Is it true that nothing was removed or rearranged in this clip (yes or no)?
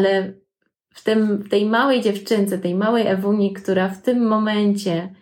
yes